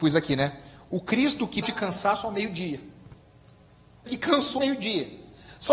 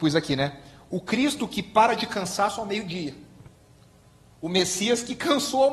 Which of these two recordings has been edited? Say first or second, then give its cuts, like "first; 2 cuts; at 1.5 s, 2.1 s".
first; 3 cuts; at 1.6 s, 4.1 s, 4.6 s